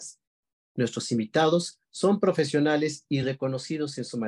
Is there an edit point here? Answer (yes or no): no